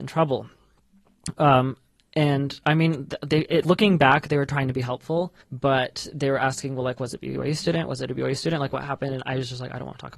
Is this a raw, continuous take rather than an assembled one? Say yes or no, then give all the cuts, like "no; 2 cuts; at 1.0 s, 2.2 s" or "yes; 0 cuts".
no; 2 cuts; at 3.6 s, 5.4 s